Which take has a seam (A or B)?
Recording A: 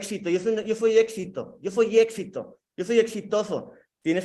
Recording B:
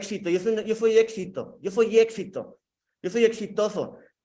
A